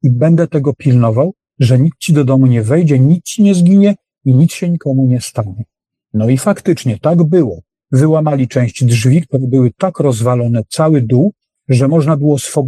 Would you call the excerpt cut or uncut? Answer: uncut